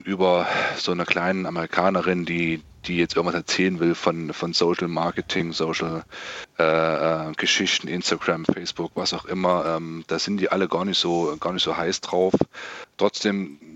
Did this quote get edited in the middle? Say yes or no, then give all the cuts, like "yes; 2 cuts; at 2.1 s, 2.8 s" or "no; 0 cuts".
no; 0 cuts